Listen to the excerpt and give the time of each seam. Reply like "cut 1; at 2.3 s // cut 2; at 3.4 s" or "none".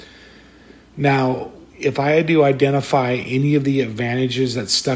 cut 1; at 1.7 s